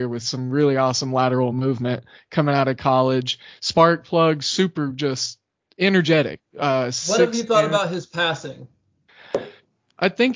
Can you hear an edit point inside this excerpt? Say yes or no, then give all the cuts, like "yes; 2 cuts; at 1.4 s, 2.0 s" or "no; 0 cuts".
no; 0 cuts